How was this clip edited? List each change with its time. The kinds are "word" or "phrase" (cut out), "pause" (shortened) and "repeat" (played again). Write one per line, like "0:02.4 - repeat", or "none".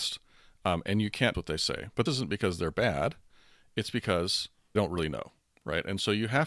0:01.3 - word
0:02.1 - word
0:04.8 - word